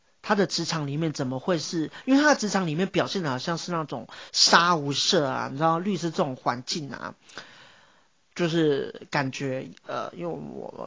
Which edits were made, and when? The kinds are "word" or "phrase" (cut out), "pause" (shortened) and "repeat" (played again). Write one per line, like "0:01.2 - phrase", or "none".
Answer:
none